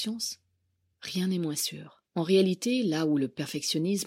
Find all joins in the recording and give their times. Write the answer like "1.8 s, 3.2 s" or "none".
2.1 s